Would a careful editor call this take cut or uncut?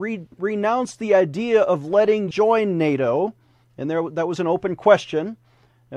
cut